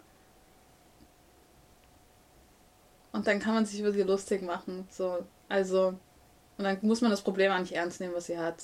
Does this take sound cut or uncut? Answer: uncut